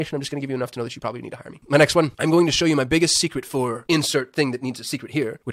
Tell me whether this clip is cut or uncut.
uncut